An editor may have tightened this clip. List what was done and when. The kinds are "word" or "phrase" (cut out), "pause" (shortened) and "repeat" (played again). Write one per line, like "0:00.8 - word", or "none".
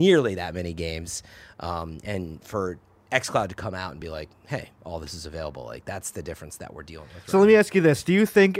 none